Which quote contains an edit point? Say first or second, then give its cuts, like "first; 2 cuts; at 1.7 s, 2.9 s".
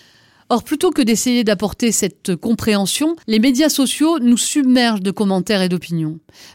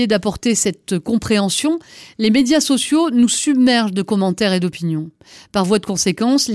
first; 1 cut; at 3.2 s